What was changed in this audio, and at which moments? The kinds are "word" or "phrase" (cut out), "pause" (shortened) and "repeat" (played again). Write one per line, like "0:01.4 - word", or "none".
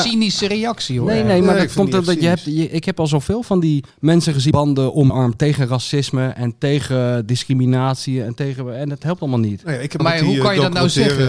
0:03.9 - pause
0:04.5 - word
0:05.1 - word
0:10.0 - word